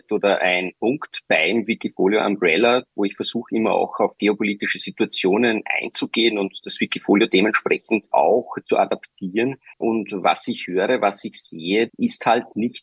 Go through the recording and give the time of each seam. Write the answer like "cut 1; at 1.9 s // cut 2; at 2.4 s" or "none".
cut 1; at 9.7 s // cut 2; at 11.9 s